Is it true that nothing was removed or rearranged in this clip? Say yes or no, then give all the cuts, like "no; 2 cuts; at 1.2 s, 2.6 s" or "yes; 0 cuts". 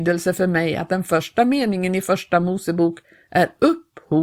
yes; 0 cuts